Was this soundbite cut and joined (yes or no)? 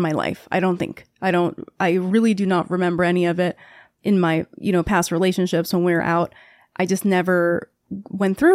no